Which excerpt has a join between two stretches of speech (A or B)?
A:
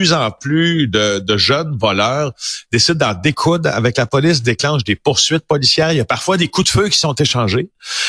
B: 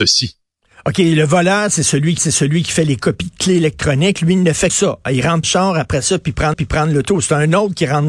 B